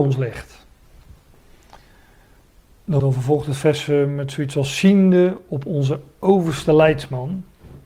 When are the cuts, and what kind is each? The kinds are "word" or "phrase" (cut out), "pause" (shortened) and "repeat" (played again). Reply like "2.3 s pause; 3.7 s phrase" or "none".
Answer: 3.0 s word

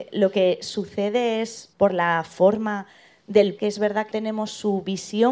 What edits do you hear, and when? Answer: 1.7 s word; 3.6 s word; 4.1 s word

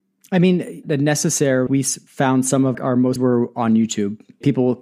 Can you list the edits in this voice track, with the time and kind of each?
1.7 s word; 2.7 s word; 3.2 s phrase

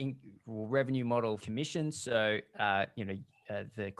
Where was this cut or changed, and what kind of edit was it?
1.4 s phrase

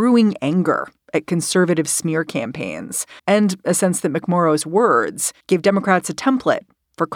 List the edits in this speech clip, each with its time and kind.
3.2 s pause; 5.4 s pause

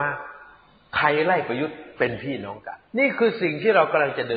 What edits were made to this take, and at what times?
2.9 s pause

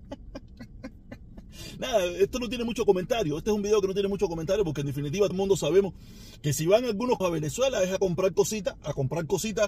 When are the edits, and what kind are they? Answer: 5.3 s word; 7.2 s word

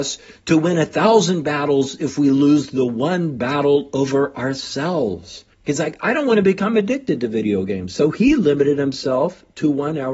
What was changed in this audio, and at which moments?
5.5 s pause

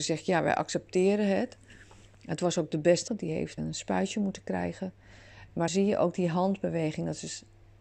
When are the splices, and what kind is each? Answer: 3.1 s word; 3.6 s word; 5.7 s word

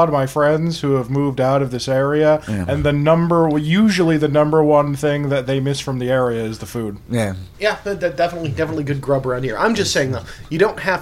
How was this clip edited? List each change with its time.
7.5 s pause

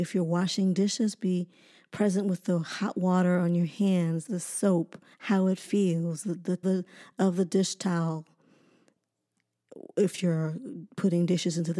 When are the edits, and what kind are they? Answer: 4.3 s word; 5.1 s pause; 6.6 s phrase

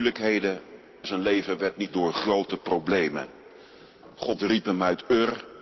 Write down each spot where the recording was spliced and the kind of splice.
1.0 s word; 1.9 s word

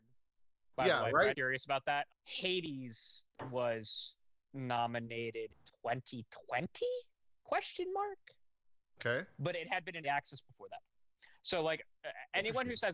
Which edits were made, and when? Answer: 1.3 s word; 2.1 s word; 5.5 s word; 10.0 s word

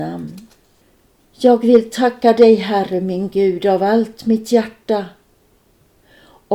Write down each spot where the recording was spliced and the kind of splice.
none

